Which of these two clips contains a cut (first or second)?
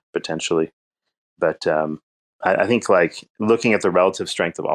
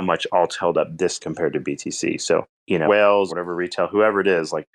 second